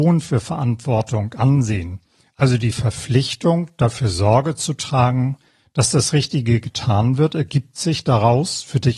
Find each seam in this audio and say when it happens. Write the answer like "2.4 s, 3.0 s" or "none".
none